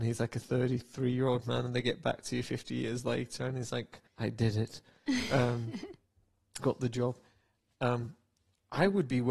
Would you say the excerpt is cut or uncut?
cut